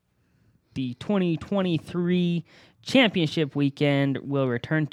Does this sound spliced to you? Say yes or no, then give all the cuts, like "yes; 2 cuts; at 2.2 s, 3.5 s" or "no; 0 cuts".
no; 0 cuts